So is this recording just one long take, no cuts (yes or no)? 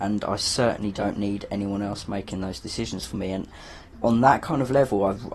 yes